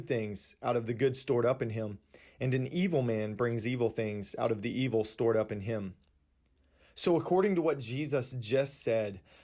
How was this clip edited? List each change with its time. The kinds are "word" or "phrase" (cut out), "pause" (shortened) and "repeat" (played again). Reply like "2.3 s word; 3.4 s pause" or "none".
none